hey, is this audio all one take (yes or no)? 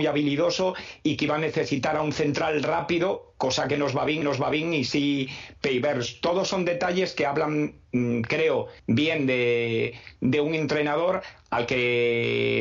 no